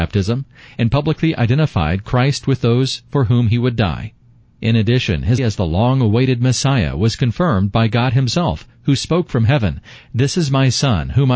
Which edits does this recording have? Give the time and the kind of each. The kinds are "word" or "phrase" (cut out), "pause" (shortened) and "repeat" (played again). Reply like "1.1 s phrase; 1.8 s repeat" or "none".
5.4 s word